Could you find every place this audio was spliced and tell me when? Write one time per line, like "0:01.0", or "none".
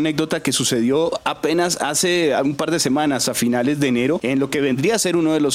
none